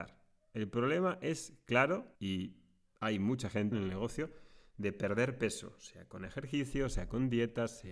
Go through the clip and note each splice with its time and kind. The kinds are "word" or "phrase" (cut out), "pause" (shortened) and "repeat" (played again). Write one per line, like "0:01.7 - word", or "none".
0:02.1 - pause
0:03.7 - word